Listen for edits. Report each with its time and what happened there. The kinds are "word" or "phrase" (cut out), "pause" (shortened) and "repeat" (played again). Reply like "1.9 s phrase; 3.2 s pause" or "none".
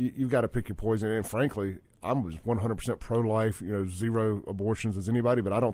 none